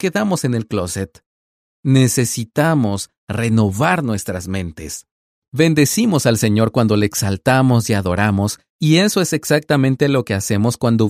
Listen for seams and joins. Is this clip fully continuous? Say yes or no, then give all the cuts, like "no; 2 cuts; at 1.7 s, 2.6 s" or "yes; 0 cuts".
yes; 0 cuts